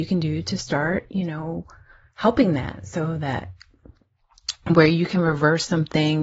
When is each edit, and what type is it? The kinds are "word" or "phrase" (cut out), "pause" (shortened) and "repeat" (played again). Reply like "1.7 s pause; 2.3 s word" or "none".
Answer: none